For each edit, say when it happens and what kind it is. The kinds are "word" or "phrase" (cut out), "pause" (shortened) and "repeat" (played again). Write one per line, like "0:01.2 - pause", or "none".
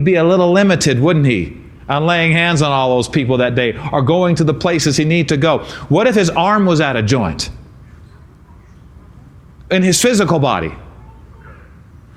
none